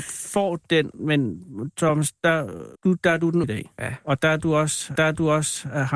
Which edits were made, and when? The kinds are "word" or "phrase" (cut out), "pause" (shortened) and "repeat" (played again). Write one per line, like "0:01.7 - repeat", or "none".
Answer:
0:01.0 - word
0:02.8 - pause
0:03.4 - word
0:05.0 - repeat